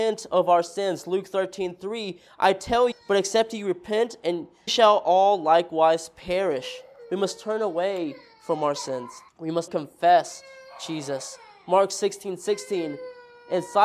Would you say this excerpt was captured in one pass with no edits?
no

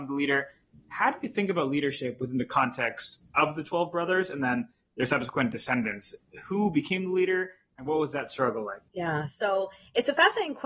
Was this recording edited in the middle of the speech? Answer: yes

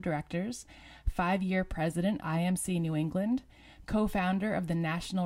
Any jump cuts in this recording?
yes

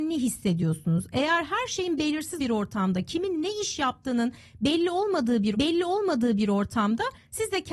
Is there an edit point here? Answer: yes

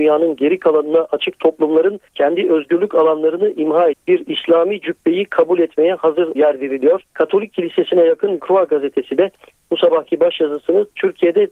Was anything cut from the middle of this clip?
yes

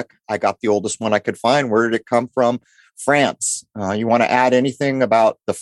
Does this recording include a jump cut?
no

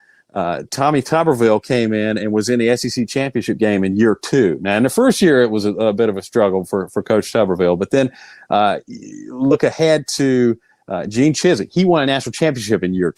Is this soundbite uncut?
yes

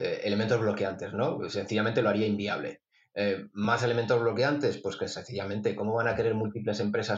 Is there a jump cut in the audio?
no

